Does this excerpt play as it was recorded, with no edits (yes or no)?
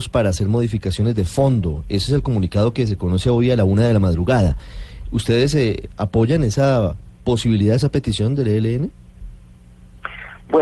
yes